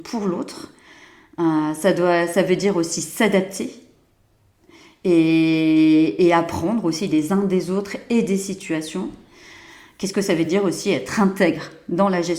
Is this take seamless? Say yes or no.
yes